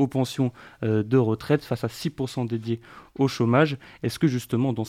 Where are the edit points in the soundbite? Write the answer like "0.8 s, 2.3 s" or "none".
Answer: none